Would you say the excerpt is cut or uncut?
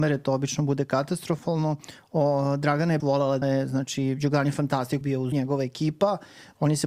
cut